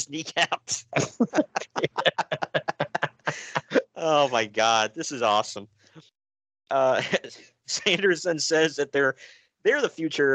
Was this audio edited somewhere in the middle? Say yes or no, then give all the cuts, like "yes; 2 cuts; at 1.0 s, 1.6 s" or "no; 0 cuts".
no; 0 cuts